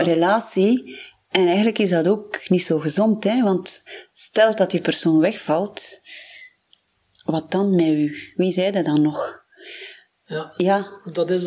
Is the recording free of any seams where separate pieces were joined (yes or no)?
yes